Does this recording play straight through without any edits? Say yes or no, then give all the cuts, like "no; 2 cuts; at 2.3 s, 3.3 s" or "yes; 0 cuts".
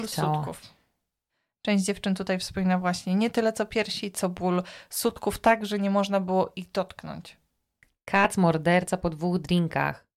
yes; 0 cuts